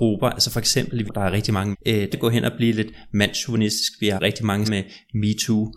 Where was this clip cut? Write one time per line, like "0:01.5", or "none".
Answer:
0:01.1
0:01.7
0:02.1
0:04.2
0:04.6